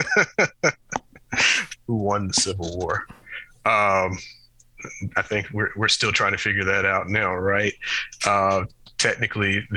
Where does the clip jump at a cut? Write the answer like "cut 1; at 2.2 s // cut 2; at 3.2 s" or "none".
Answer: none